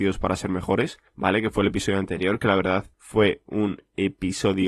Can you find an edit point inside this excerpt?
yes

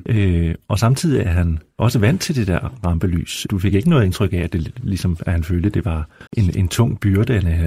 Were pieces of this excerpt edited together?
yes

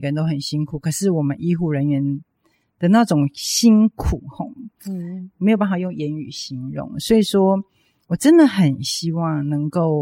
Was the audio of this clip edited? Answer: no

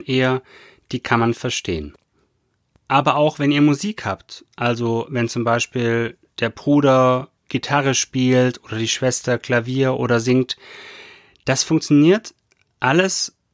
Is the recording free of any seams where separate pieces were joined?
no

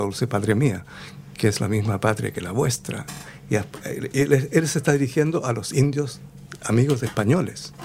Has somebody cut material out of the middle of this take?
no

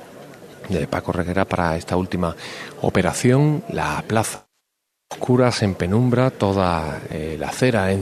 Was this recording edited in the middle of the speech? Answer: no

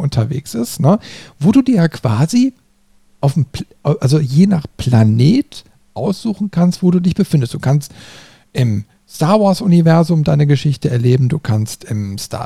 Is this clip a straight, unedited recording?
yes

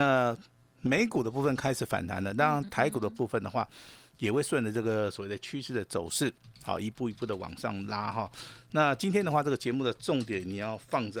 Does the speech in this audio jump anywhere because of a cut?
no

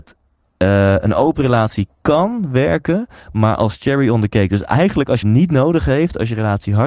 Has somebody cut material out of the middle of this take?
yes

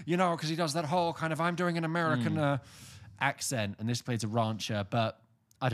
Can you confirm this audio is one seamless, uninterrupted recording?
yes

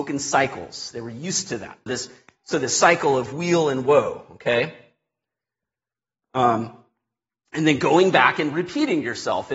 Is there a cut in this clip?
yes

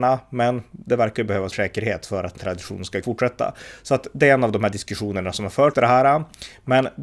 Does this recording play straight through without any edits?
no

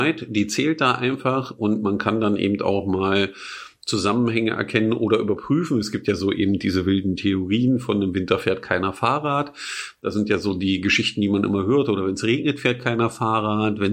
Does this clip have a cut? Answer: no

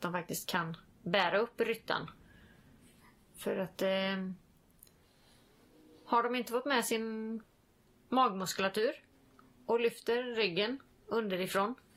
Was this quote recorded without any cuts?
yes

